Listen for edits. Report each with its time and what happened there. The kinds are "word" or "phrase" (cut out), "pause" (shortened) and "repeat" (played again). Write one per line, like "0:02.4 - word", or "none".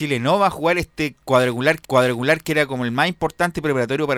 0:01.8 - repeat